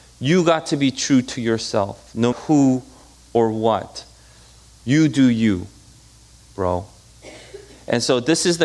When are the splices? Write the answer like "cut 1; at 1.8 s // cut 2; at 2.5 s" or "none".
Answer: cut 1; at 2.3 s